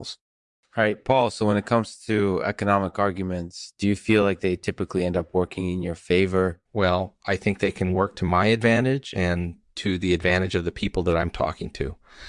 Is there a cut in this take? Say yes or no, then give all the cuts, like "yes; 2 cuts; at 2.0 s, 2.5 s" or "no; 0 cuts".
yes; 1 cut; at 6.7 s